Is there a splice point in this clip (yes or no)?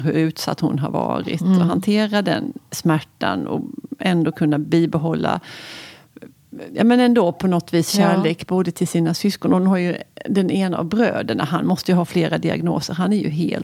no